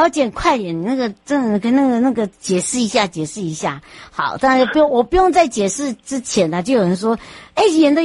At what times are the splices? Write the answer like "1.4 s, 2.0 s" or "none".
none